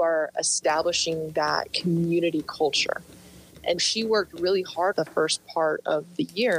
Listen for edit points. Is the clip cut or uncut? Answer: cut